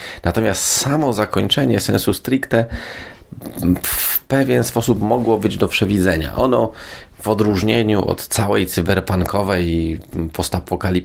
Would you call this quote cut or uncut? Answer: uncut